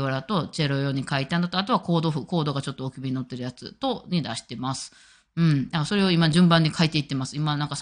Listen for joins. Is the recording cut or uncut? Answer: uncut